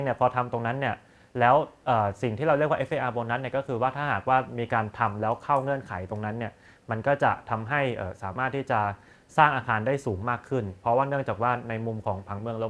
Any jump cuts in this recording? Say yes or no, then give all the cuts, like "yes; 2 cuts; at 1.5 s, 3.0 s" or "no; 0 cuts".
no; 0 cuts